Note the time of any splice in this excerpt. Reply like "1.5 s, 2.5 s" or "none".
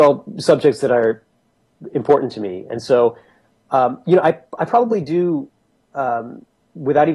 none